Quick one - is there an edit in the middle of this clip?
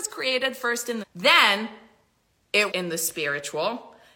yes; 2 cuts; at 1.0 s, 2.7 s

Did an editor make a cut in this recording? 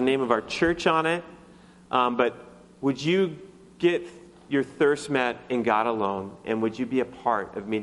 no; 0 cuts

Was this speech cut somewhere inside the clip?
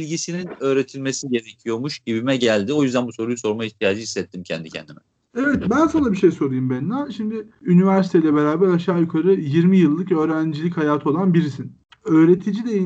no; 0 cuts

